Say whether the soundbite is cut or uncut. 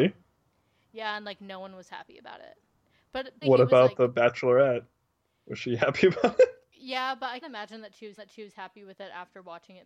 cut